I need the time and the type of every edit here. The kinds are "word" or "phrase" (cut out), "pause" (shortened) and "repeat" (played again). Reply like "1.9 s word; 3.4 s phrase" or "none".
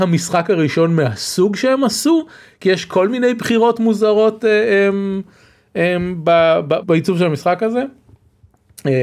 6.8 s word